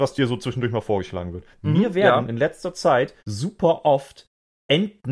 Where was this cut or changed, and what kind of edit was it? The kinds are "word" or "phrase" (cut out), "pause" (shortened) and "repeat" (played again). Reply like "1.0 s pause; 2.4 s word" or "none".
1.5 s pause; 3.2 s pause